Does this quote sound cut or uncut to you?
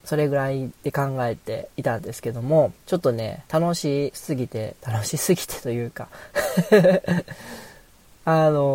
cut